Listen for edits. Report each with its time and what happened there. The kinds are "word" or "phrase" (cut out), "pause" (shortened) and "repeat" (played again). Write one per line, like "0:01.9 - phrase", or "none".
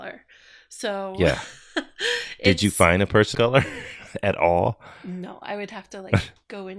0:03.3 - word